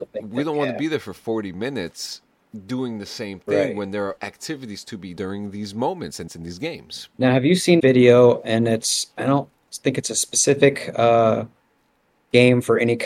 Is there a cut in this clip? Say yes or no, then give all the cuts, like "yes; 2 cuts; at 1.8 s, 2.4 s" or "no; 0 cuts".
yes; 5 cuts; at 4.2 s, 5.2 s, 6.3 s, 7.1 s, 7.8 s